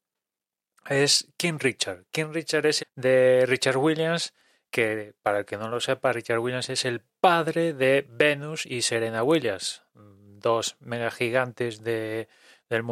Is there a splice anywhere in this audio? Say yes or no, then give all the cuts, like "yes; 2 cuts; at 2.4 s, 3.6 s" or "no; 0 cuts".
yes; 1 cut; at 2.8 s